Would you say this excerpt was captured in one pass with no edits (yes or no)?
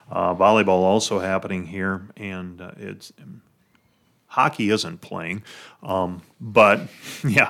yes